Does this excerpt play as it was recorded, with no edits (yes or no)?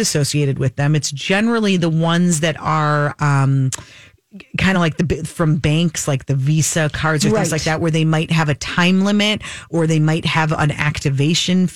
yes